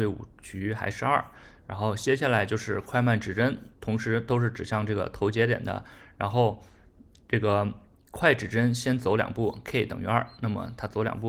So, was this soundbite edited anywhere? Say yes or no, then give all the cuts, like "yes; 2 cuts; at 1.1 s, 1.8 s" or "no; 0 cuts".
yes; 1 cut; at 3.7 s